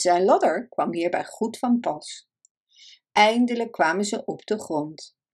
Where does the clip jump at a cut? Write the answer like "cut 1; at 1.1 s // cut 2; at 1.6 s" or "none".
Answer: none